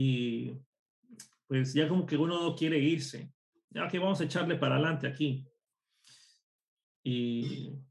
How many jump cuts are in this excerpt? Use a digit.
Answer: 0